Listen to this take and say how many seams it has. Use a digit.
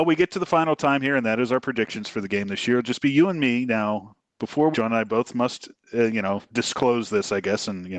1